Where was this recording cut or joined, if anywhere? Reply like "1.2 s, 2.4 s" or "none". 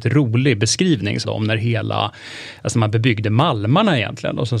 1.2 s

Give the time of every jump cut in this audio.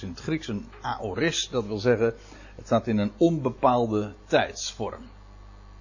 none

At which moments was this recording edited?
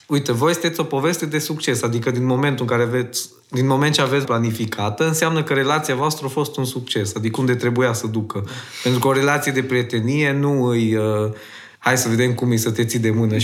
4.2 s, 7.4 s, 11.8 s

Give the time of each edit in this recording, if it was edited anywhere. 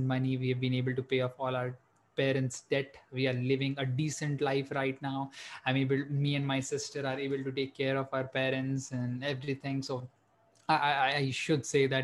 none

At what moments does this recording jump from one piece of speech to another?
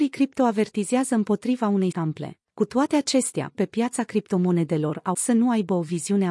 1.9 s, 2.4 s, 3.5 s, 5.1 s

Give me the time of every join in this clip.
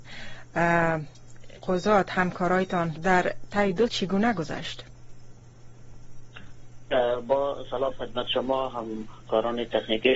1.6 s, 3.0 s, 3.9 s, 7.9 s

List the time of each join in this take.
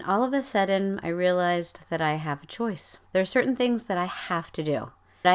3.0 s

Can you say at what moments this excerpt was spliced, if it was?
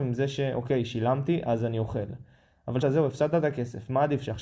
2.8 s

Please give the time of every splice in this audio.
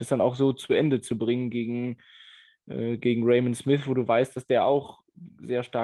none

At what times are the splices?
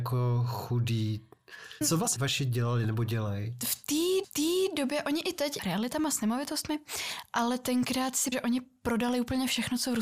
1.8 s, 2.2 s, 4.2 s, 5.6 s, 8.3 s

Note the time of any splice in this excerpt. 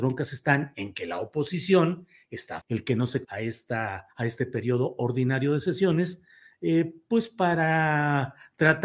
2.6 s, 3.2 s, 4.1 s

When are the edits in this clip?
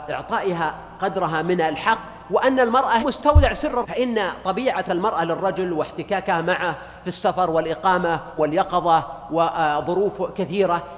3.0 s, 3.8 s, 4.9 s, 8.4 s

